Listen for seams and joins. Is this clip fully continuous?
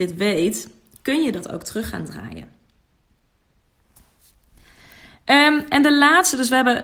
yes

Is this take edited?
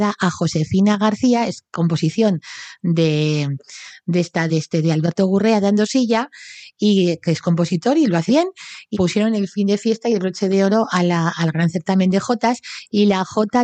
yes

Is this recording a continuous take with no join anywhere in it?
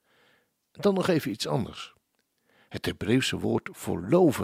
no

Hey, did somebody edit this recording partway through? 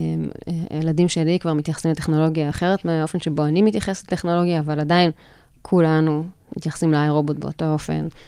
no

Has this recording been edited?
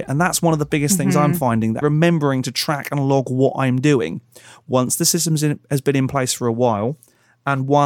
yes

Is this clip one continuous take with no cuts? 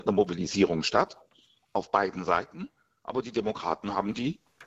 yes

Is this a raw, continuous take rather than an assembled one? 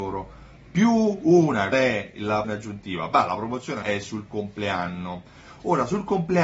no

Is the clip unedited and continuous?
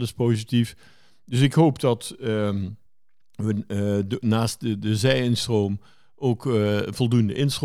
yes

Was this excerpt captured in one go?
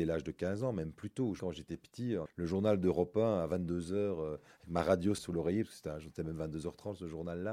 no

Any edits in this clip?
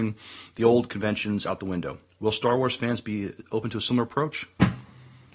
no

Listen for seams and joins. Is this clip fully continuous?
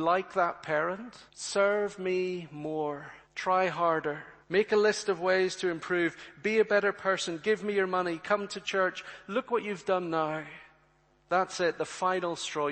no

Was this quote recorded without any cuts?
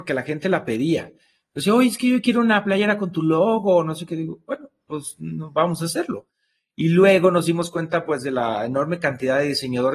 yes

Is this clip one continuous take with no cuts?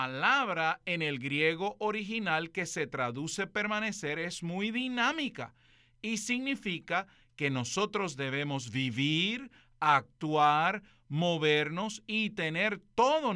yes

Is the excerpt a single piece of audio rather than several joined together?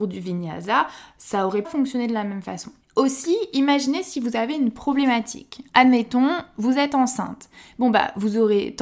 no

